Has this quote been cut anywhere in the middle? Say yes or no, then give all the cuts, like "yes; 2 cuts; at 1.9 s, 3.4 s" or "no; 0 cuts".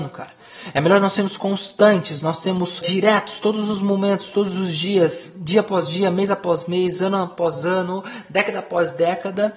yes; 1 cut; at 2.8 s